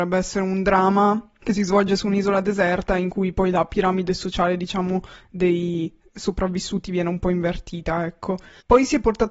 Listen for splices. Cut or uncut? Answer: uncut